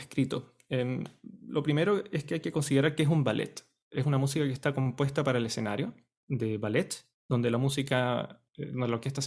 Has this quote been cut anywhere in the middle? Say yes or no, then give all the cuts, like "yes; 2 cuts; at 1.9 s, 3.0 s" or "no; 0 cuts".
no; 0 cuts